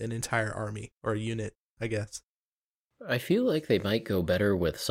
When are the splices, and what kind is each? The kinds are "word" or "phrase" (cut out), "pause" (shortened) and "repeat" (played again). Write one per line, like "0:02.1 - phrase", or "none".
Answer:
0:00.9 - pause